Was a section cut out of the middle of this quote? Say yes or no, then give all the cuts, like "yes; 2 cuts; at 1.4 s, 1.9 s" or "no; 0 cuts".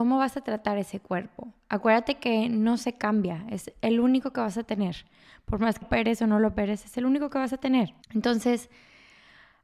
yes; 2 cuts; at 5.8 s, 8.0 s